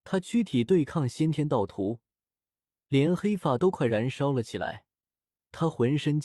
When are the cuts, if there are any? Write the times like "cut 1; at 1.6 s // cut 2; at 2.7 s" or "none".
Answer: none

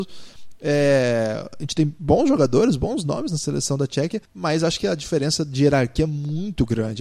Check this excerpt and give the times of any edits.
cut 1; at 4.2 s

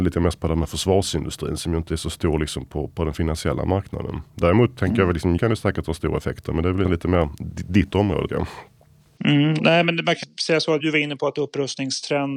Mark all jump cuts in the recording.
cut 1; at 2.9 s // cut 2; at 5.4 s // cut 3; at 6.8 s // cut 4; at 8.3 s // cut 5; at 9.6 s // cut 6; at 10.2 s // cut 7; at 10.8 s

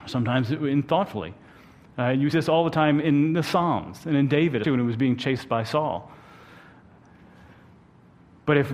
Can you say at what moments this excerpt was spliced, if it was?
cut 1; at 2.3 s // cut 2; at 4.6 s

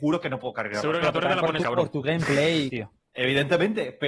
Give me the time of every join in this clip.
cut 1; at 1.0 s // cut 2; at 1.6 s // cut 3; at 2.7 s

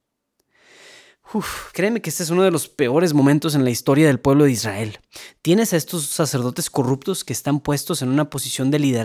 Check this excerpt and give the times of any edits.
cut 1; at 1.7 s

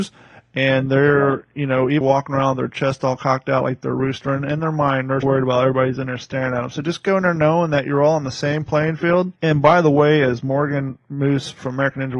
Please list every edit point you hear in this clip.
cut 1; at 2.0 s // cut 2; at 5.2 s // cut 3; at 9.4 s

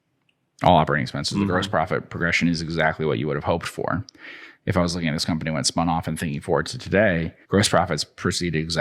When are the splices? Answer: cut 1; at 7.4 s

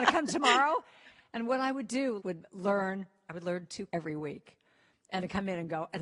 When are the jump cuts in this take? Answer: cut 1; at 2.2 s // cut 2; at 3.9 s

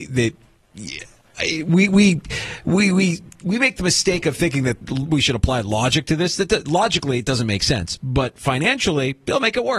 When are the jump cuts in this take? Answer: none

